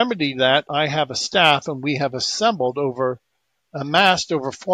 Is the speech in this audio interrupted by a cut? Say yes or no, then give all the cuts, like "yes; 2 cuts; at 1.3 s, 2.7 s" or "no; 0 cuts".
no; 0 cuts